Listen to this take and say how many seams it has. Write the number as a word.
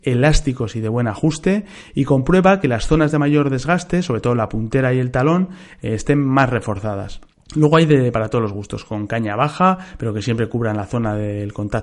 zero